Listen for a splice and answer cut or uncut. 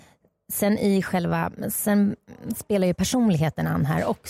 uncut